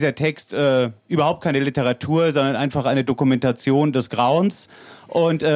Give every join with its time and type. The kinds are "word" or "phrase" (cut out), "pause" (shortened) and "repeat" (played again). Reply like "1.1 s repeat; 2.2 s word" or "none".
1.0 s pause